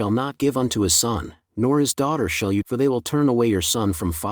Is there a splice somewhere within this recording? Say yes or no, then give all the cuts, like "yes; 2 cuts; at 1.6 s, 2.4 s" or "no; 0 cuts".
yes; 1 cut; at 2.6 s